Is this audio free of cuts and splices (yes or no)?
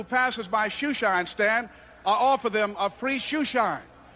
yes